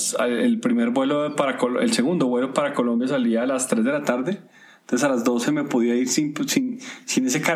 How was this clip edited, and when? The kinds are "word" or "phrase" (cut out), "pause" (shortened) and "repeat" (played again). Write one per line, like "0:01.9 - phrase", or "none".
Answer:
none

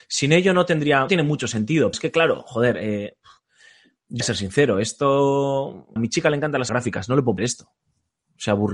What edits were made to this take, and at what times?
0:01.1 - word
0:01.9 - word
0:04.2 - word
0:06.0 - word
0:06.7 - word
0:07.4 - word

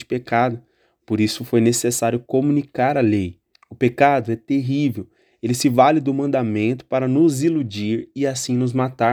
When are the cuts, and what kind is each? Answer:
0:03.5 - pause

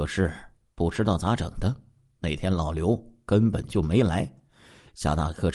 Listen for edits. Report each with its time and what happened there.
none

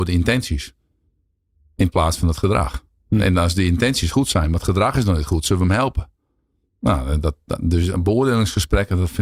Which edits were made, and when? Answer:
none

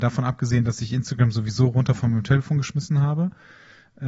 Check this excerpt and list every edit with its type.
none

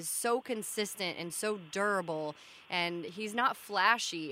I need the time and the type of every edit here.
none

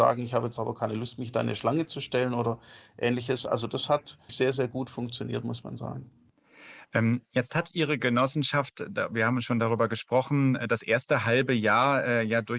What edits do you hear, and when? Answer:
0:04.3 - word

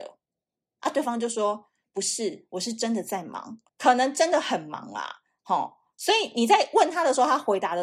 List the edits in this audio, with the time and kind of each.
0:03.7 - pause

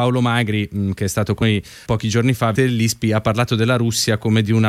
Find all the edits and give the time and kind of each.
0:01.4 - word
0:01.9 - word
0:02.5 - word

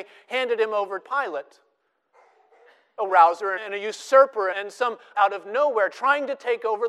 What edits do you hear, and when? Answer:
0:01.0 - word
0:03.1 - word
0:03.6 - word
0:04.5 - word
0:05.1 - word

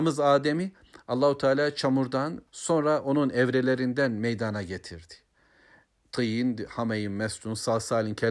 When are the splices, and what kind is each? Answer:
0:02.5 - pause

